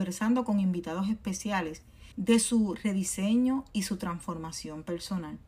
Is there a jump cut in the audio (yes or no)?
yes